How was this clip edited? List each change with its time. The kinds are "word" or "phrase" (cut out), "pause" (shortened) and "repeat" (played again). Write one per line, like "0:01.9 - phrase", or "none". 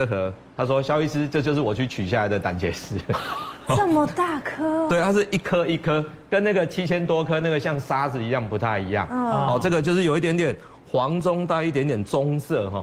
none